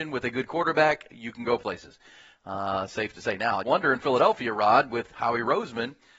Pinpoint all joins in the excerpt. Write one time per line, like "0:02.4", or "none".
0:03.6